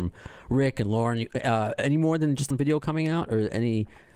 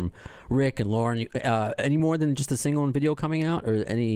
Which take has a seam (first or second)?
first